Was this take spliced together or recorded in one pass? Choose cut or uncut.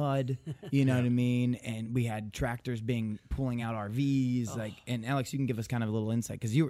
uncut